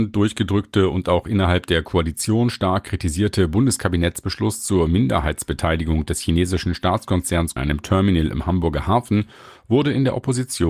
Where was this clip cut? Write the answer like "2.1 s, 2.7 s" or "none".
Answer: 7.6 s